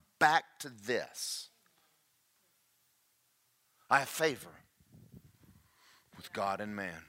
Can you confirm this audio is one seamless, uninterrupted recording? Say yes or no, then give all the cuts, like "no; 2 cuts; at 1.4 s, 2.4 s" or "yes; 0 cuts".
yes; 0 cuts